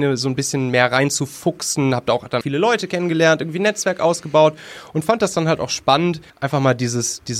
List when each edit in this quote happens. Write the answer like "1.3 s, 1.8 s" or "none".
2.4 s, 6.3 s